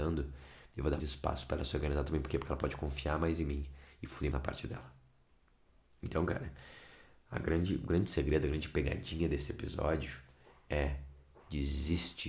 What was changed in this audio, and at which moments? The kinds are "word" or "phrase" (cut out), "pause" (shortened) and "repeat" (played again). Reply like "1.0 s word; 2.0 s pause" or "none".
1.0 s word; 4.3 s word